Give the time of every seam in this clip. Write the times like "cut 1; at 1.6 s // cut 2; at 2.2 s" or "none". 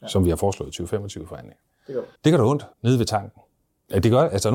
cut 1; at 2.2 s // cut 2; at 2.7 s // cut 3; at 3.6 s

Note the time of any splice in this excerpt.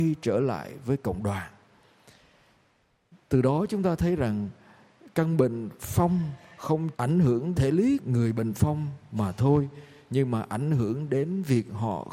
cut 1; at 6.9 s // cut 2; at 7.5 s // cut 3; at 8.0 s

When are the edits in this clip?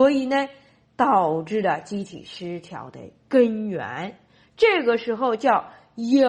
none

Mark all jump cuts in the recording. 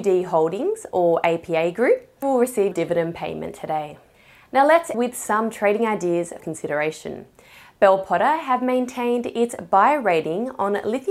cut 1; at 2.2 s // cut 2; at 2.7 s // cut 3; at 4.1 s // cut 4; at 4.9 s // cut 5; at 6.4 s

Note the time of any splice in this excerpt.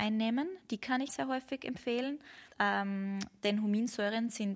cut 1; at 1.1 s // cut 2; at 2.5 s

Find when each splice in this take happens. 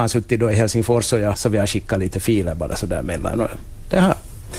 cut 1; at 1.3 s

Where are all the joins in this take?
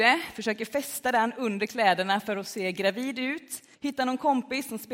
cut 1; at 3.7 s

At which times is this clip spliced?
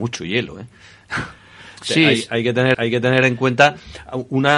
cut 1; at 2.7 s

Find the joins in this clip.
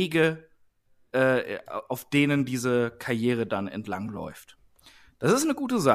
none

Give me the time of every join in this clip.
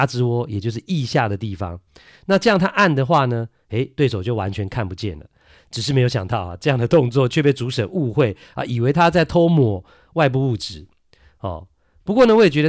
none

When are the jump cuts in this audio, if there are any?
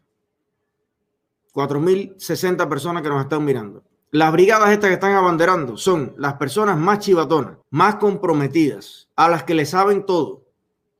cut 1; at 7.6 s // cut 2; at 9.1 s

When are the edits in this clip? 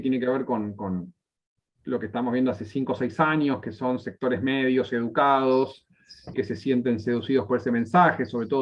cut 1; at 6.3 s

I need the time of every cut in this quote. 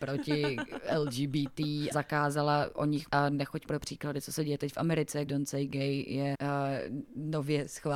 cut 1; at 1.9 s // cut 2; at 3.1 s // cut 3; at 3.7 s // cut 4; at 5.3 s // cut 5; at 6.3 s

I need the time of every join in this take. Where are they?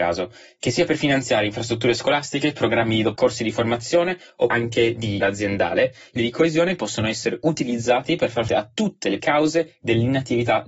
cut 1; at 3.1 s // cut 2; at 4.5 s // cut 3; at 5.2 s // cut 4; at 6.2 s // cut 5; at 8.5 s // cut 6; at 9.2 s

